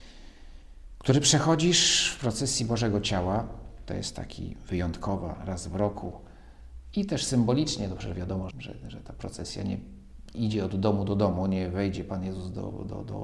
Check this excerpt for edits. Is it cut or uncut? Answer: cut